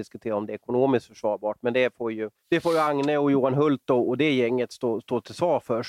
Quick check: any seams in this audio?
yes; 1 cut; at 2.4 s

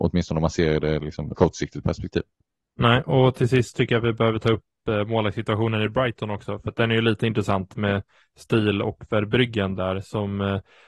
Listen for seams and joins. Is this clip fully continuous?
no; 2 cuts; at 1.3 s, 2.3 s

